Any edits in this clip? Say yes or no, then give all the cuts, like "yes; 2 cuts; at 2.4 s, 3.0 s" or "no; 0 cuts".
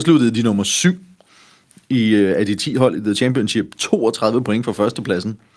no; 0 cuts